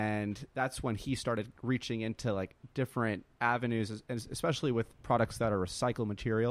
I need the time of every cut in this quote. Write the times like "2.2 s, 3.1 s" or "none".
3.3 s